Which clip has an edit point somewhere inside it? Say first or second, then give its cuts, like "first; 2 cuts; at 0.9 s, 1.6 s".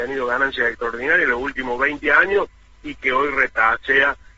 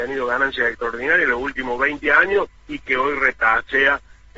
second; 1 cut; at 2.6 s